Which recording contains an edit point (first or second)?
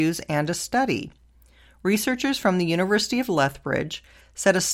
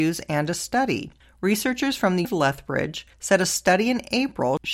second